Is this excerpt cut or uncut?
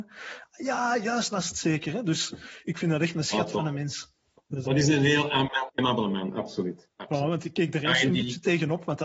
cut